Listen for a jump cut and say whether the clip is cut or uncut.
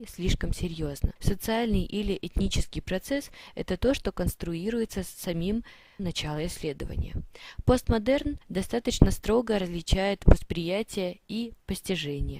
cut